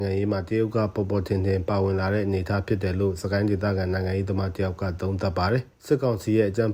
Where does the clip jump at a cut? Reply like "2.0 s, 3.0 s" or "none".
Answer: 5.7 s